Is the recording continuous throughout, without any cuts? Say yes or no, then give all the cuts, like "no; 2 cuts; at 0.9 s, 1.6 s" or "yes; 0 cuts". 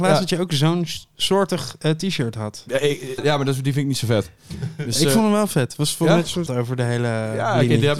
no; 2 cuts; at 3.2 s, 6.5 s